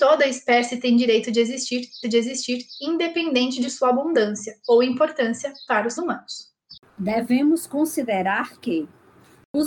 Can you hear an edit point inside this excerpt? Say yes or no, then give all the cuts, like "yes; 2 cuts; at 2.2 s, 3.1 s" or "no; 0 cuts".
yes; 2 cuts; at 2.0 s, 6.0 s